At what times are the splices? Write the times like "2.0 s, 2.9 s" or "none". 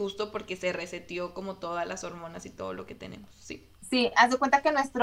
3.8 s